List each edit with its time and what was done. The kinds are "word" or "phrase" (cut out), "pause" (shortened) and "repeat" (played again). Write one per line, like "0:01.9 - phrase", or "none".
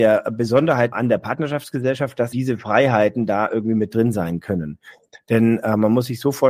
0:00.9 - word
0:02.3 - word